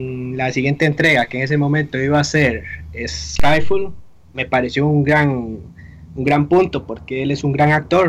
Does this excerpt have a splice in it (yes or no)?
no